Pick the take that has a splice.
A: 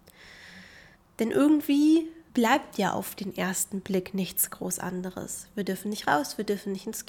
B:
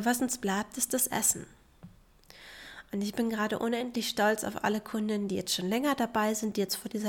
A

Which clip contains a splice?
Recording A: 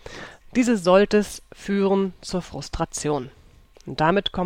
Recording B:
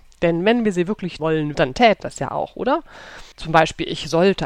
B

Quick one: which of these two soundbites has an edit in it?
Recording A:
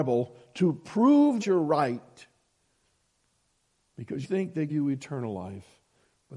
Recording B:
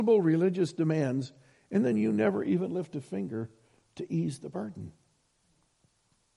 A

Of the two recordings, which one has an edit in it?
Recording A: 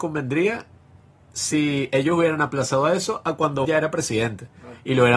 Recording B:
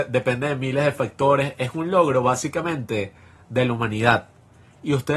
A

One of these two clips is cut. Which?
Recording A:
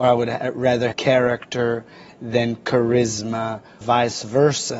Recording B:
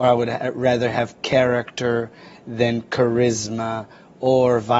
A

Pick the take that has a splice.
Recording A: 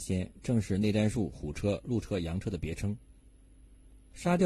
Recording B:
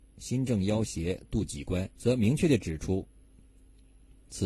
B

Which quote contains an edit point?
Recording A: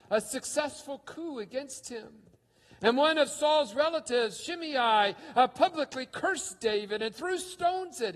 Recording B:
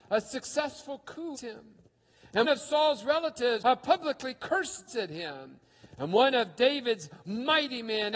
B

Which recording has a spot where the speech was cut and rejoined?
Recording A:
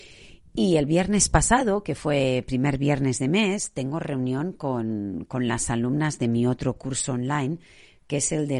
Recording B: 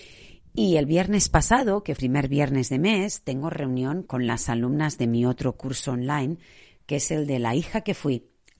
B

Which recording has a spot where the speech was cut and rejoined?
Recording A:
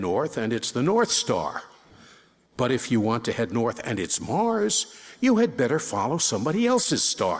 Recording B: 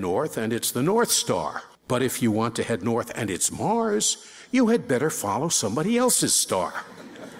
B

